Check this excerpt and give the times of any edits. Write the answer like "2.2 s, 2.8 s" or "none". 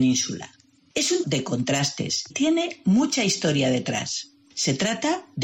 1.2 s, 2.3 s